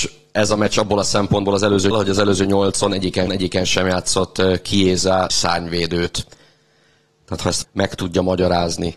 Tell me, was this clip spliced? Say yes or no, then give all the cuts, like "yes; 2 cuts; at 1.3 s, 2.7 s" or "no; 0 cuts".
yes; 4 cuts; at 1.9 s, 3.3 s, 5.3 s, 7.6 s